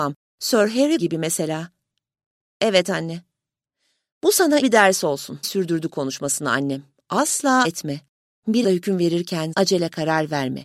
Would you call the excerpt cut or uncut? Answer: cut